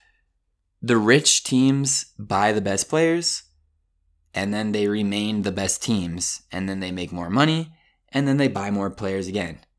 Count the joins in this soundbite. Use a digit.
0